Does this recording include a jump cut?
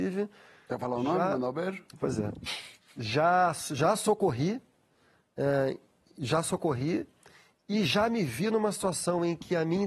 no; 0 cuts

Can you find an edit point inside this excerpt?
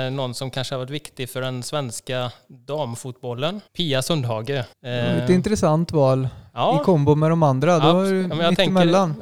yes; 2 cuts; at 3.7 s, 4.7 s

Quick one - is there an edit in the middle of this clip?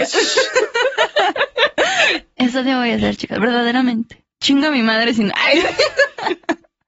no; 0 cuts

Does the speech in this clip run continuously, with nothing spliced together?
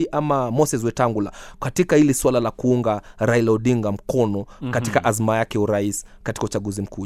yes; 0 cuts

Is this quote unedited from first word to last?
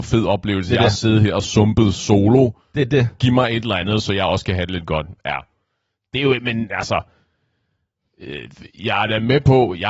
yes; 0 cuts

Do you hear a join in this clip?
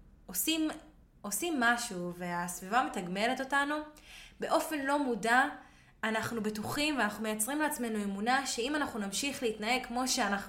no; 0 cuts

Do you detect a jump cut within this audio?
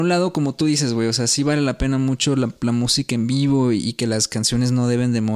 no; 0 cuts

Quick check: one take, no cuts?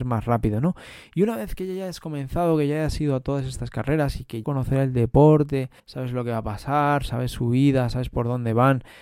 no; 2 cuts; at 4.4 s, 5.8 s

